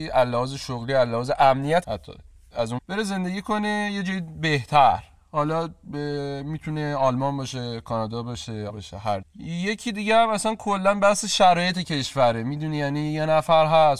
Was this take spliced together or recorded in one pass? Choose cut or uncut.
cut